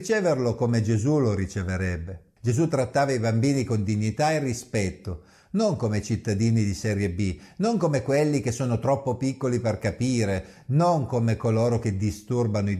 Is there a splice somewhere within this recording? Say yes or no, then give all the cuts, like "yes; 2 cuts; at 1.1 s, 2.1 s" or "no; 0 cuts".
no; 0 cuts